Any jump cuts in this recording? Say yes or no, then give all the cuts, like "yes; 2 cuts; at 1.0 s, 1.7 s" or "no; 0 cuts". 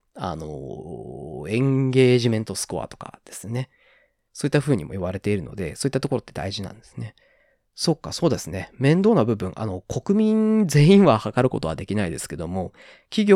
no; 0 cuts